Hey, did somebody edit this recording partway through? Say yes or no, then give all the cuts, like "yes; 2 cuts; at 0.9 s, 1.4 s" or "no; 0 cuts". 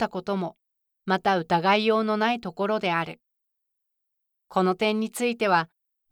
no; 0 cuts